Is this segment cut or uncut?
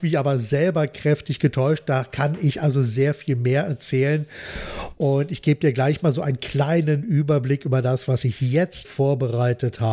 cut